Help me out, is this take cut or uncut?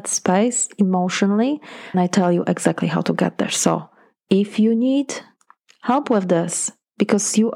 cut